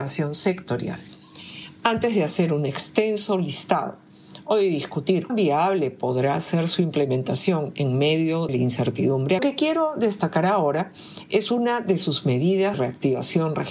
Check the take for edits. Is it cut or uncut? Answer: cut